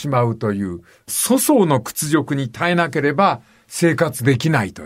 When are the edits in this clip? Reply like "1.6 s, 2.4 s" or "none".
0.9 s